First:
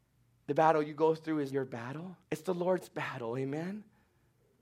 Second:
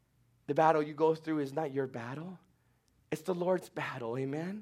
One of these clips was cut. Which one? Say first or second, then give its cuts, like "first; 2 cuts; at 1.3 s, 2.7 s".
first; 2 cuts; at 1.5 s, 2.2 s